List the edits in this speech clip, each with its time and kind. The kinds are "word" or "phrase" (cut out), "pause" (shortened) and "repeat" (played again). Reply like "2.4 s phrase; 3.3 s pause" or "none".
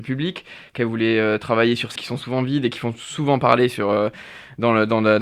2.0 s word